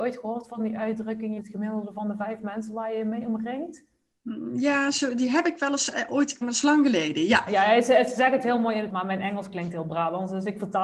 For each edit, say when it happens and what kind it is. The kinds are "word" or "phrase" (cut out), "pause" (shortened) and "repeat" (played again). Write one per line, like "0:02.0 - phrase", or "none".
0:01.4 - phrase
0:06.4 - phrase
0:07.5 - word
0:08.9 - word